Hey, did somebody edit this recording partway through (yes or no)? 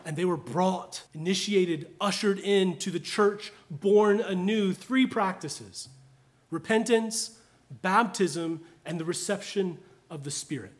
yes